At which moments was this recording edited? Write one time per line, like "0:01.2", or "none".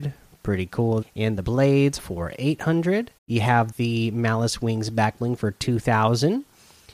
0:01.0
0:01.4
0:02.0
0:03.2
0:03.7